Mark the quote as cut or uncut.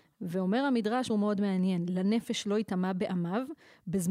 cut